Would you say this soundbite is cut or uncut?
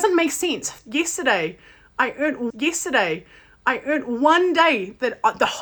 cut